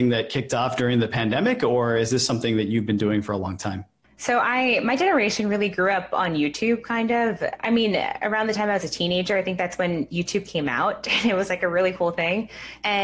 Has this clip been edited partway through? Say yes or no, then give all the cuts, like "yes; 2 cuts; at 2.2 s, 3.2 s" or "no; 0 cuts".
no; 0 cuts